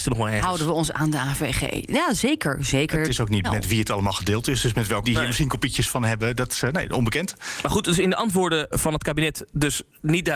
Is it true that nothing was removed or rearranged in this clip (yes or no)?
no